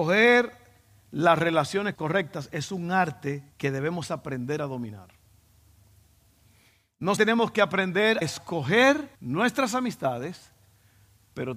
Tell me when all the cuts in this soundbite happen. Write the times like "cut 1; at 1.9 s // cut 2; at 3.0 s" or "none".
cut 1; at 1.9 s // cut 2; at 3.5 s // cut 3; at 7.2 s // cut 4; at 8.2 s // cut 5; at 9.1 s